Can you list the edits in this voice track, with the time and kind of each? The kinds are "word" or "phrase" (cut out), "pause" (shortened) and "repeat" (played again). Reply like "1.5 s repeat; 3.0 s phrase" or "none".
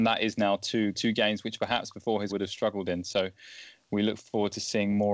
0.9 s phrase; 2.3 s phrase